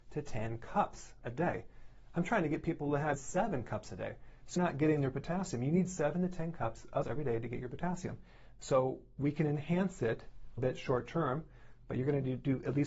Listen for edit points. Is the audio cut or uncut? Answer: cut